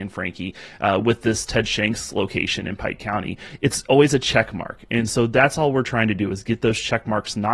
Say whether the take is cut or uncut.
uncut